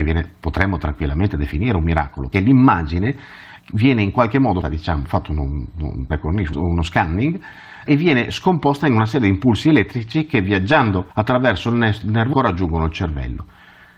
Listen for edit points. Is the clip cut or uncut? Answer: cut